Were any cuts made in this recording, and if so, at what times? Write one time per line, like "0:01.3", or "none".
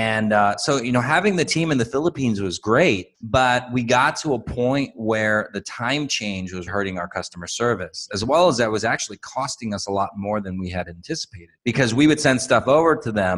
0:03.1
0:06.7
0:11.6